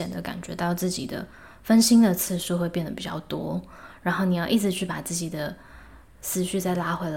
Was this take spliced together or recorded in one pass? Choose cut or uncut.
uncut